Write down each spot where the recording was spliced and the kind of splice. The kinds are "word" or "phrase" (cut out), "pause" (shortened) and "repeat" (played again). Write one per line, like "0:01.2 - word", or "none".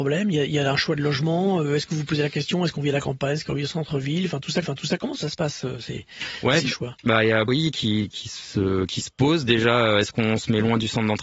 0:04.6 - repeat
0:07.5 - phrase
0:08.1 - word